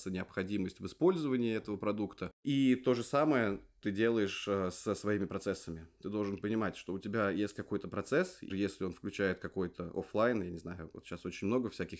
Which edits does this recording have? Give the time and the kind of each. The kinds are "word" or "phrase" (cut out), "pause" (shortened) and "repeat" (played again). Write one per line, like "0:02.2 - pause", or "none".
0:07.6 - word
0:08.5 - word